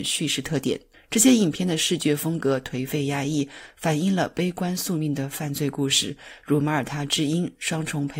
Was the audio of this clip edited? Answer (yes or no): yes